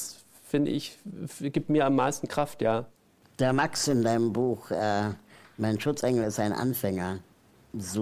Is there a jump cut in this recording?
no; 0 cuts

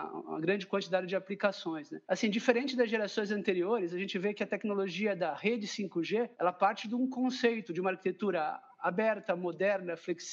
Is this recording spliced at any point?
yes; 2 cuts; at 2.0 s, 6.3 s

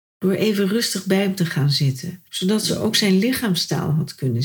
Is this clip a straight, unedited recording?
no; 1 cut; at 2.3 s

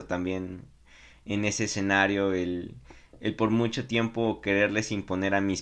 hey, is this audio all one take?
yes; 0 cuts

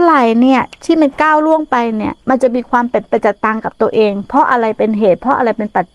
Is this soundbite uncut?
no; 1 cut; at 2.2 s

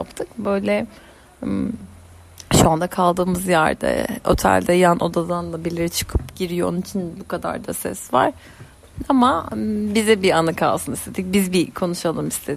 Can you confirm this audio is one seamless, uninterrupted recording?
yes; 0 cuts

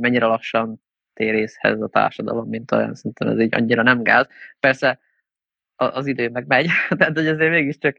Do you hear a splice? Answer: no; 0 cuts

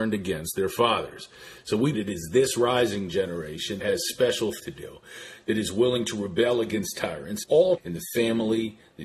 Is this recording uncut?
no; 5 cuts; at 1.9 s, 3.8 s, 4.6 s, 7.4 s, 7.8 s

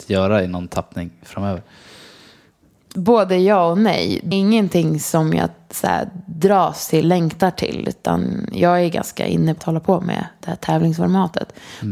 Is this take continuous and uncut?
no; 3 cuts; at 4.3 s, 7.0 s, 9.6 s

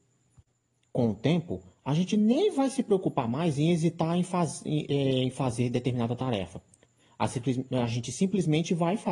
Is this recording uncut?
yes; 0 cuts

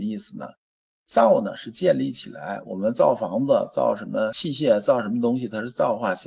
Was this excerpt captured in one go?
yes; 0 cuts

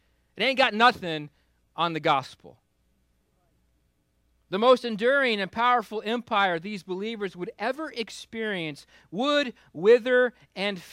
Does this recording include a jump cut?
no; 0 cuts

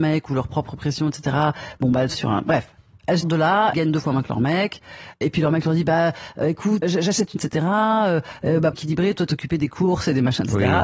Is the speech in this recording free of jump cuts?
no; 8 cuts; at 2.1 s, 3.2 s, 3.7 s, 5.2 s, 6.8 s, 7.4 s, 8.7 s, 9.3 s

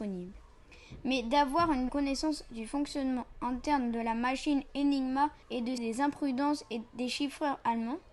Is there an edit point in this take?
yes; 3 cuts; at 1.9 s, 5.4 s, 5.8 s

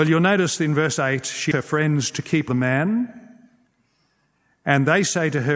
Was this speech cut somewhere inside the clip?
yes; 2 cuts; at 1.5 s, 2.5 s

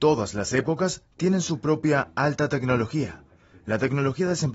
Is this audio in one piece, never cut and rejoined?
yes; 0 cuts

